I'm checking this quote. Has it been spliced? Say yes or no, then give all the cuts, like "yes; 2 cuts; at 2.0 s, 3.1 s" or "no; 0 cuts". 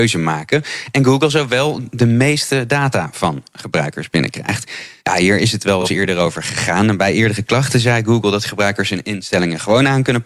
no; 0 cuts